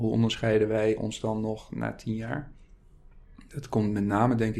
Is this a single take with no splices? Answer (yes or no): yes